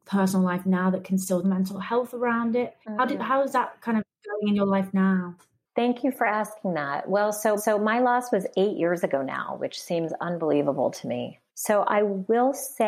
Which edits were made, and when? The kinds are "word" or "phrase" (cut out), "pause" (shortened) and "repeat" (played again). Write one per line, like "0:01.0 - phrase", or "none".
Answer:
0:01.4 - phrase
0:02.8 - pause
0:07.6 - repeat